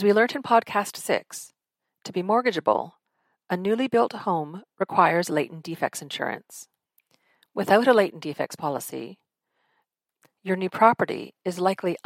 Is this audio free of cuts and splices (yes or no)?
yes